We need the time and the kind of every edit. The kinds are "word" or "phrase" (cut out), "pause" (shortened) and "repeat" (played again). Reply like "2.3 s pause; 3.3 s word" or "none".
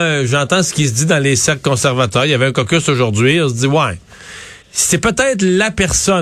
4.6 s pause